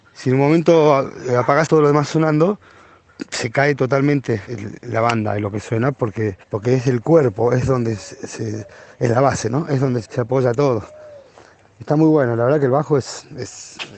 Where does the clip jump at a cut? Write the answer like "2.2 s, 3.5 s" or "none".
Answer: 1.7 s, 4.5 s, 6.4 s, 10.0 s